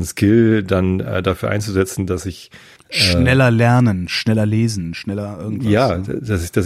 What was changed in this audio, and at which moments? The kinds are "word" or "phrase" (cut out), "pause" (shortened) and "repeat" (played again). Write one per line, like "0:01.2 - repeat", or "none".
0:02.8 - pause